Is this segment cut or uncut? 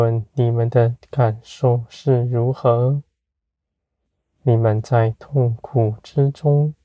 uncut